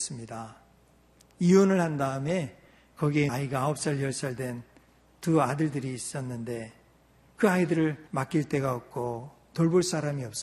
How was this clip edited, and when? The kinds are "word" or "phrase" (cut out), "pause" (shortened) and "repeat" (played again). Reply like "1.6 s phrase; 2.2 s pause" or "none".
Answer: 3.3 s word; 8.1 s pause

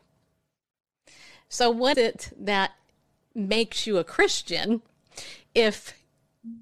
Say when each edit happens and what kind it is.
1.9 s word

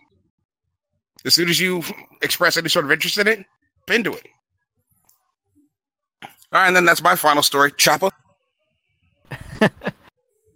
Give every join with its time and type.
3.9 s word

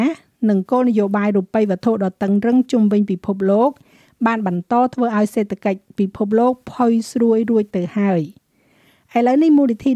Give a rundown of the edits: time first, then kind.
none

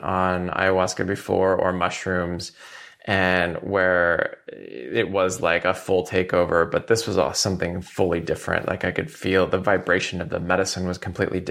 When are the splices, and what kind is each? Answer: none

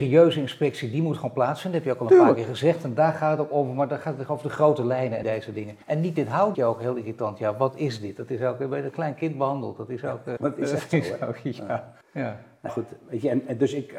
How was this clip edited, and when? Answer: 5.2 s word; 5.8 s pause; 6.5 s word; 10.4 s word; 12.0 s pause; 12.7 s word

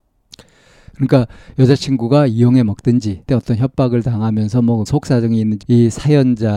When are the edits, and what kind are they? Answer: 3.3 s phrase; 4.9 s word; 5.6 s word

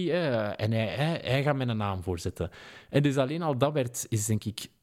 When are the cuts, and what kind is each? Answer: none

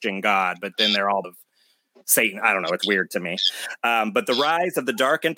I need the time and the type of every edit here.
1.2 s phrase; 2.8 s word

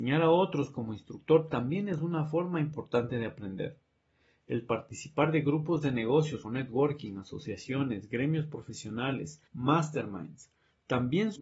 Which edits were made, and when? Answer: 6.4 s word; 9.5 s pause

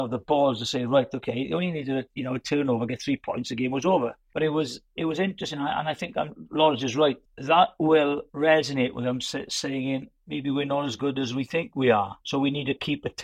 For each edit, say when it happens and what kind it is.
8.3 s pause; 12.2 s pause

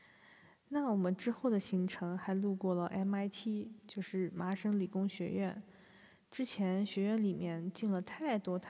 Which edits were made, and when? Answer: none

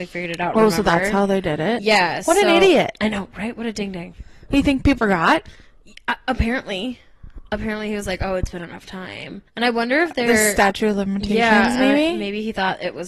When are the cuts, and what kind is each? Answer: 5.0 s word; 9.5 s pause

